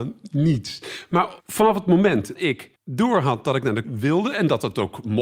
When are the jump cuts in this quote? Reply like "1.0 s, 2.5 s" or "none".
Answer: 1.4 s, 2.3 s, 2.8 s, 3.8 s